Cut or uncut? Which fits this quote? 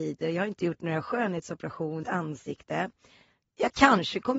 cut